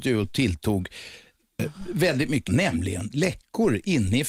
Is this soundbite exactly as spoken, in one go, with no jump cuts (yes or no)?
no